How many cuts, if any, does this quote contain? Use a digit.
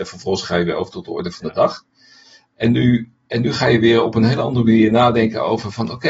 0